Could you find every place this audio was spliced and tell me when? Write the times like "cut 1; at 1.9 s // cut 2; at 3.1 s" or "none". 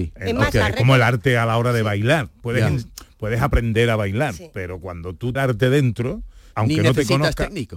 cut 1; at 5.4 s // cut 2; at 6.5 s